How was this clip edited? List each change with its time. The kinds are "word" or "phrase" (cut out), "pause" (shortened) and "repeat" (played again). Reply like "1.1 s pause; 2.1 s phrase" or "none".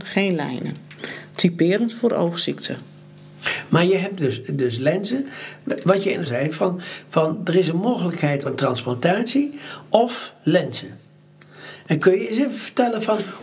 4.2 s word; 6.3 s phrase; 8.5 s phrase

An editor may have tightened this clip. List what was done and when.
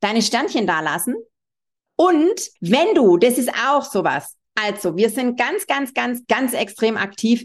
2.6 s pause; 6.2 s word

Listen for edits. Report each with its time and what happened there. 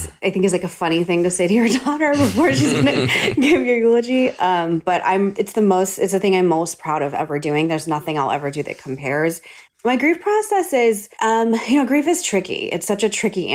11.1 s pause

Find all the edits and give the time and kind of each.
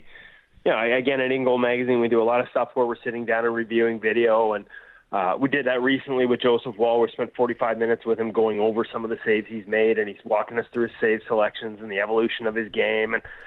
none

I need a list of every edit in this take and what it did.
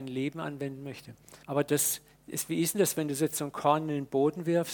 1.4 s pause

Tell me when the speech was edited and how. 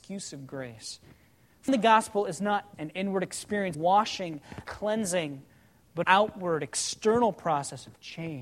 1.7 s word; 2.7 s word; 3.7 s word; 4.7 s word; 6.0 s word

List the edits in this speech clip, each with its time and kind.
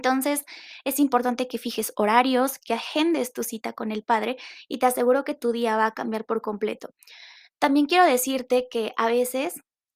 none

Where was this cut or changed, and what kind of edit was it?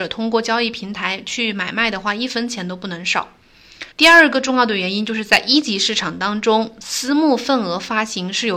3.9 s pause

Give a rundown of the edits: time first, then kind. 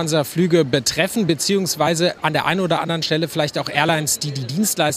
none

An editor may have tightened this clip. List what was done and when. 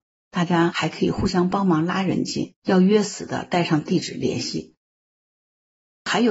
2.6 s pause

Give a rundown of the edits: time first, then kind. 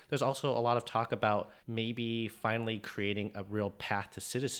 1.6 s pause

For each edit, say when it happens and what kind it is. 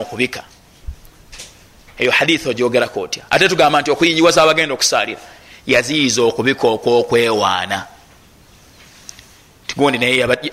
none

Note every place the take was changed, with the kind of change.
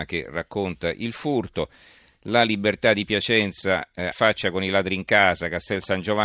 4.1 s phrase

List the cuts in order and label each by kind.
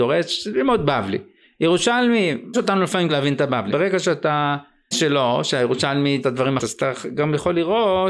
2.5 s word; 3.1 s word; 3.7 s word; 4.9 s word; 6.2 s word; 6.6 s word

